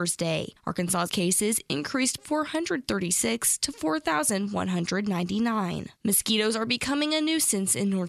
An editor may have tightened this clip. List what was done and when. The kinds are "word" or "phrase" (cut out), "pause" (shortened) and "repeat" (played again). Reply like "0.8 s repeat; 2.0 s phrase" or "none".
1.1 s word; 2.2 s word; 6.0 s pause

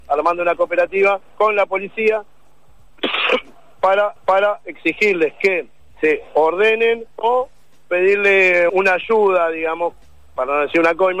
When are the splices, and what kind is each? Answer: 1.3 s pause; 4.2 s repeat; 7.1 s pause; 8.7 s word

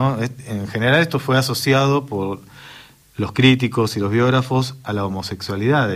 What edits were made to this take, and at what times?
none

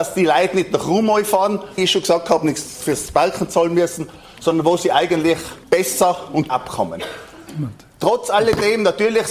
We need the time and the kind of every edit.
1.8 s phrase; 5.6 s pause; 6.5 s word

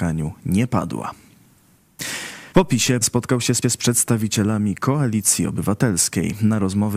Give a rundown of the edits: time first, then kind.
2.5 s pause; 3.0 s word; 3.6 s repeat

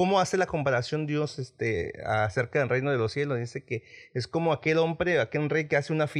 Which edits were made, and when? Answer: none

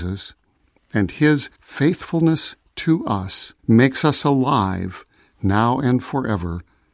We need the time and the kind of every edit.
1.5 s pause; 3.6 s pause

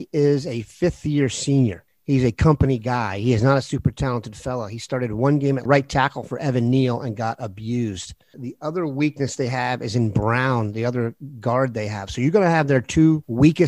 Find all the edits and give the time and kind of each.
5.7 s word

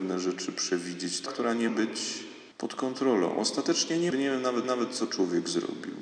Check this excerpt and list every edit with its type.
1.3 s phrase; 1.7 s word; 2.5 s pause; 4.1 s phrase; 4.6 s repeat

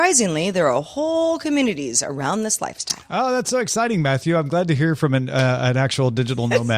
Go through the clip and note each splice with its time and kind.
none

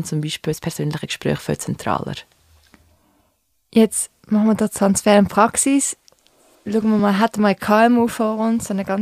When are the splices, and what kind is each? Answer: none

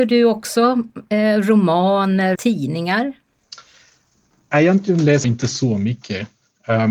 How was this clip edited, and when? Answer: 2.3 s word; 5.2 s word

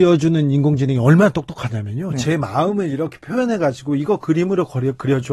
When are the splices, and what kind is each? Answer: none

